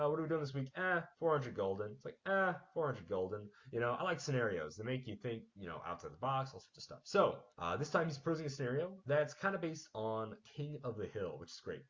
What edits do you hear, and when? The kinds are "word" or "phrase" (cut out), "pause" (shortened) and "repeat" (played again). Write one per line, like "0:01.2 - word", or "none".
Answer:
0:01.1 - pause
0:07.5 - pause